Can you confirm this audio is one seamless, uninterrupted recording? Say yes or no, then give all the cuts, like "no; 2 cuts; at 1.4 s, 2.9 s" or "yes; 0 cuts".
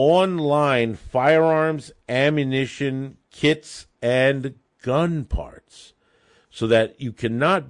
yes; 0 cuts